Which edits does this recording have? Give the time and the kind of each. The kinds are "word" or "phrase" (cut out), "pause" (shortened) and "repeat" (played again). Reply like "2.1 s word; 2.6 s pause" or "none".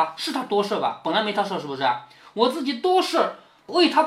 none